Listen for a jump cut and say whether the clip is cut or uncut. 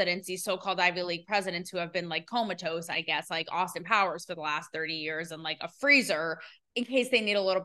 uncut